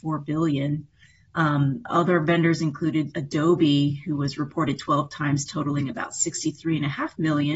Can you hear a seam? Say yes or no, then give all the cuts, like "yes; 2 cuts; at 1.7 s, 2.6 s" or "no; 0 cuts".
no; 0 cuts